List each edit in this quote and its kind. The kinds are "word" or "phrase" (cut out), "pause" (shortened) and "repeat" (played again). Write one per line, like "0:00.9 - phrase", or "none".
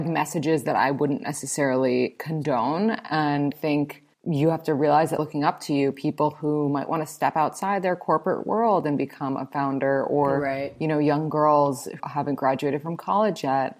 0:03.5 - word
0:04.1 - pause
0:05.2 - phrase
0:12.0 - word